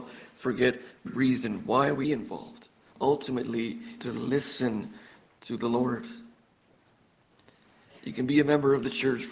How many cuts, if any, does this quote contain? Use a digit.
3